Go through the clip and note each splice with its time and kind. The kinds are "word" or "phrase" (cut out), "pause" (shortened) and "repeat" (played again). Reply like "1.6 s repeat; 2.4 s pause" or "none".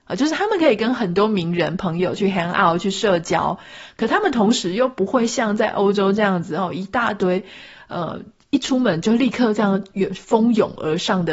none